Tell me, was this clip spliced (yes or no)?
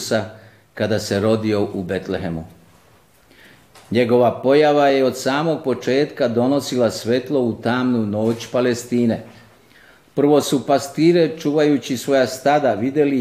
no